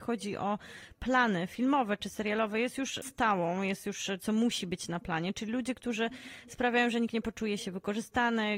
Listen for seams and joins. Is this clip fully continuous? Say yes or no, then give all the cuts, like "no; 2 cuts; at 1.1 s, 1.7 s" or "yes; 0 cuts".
no; 1 cut; at 4.2 s